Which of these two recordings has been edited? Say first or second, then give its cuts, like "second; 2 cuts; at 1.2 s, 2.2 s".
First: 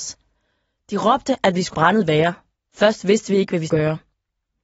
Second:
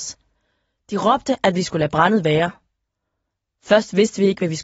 first; 3 cuts; at 1.7 s, 2.5 s, 3.7 s